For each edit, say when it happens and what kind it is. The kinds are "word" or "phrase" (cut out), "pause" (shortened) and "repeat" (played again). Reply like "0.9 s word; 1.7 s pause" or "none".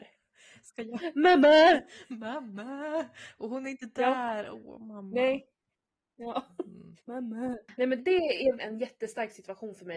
7.0 s pause; 8.0 s word; 8.6 s word